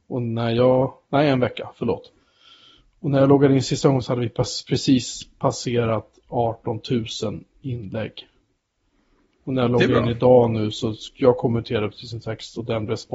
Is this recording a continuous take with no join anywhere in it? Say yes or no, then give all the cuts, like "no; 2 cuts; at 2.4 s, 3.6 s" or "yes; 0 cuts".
yes; 0 cuts